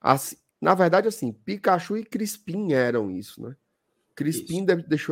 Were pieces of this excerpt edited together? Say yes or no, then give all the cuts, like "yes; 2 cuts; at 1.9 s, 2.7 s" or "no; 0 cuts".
no; 0 cuts